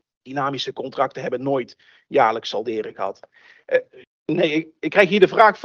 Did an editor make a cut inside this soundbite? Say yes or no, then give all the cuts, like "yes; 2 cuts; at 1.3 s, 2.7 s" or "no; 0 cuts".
no; 0 cuts